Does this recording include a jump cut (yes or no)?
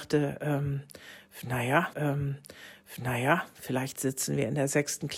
yes